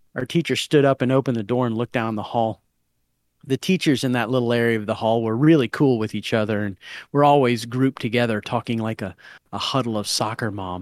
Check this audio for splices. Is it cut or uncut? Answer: uncut